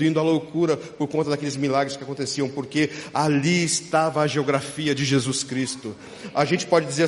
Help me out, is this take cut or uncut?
uncut